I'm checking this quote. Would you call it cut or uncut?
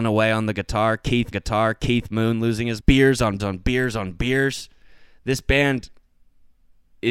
cut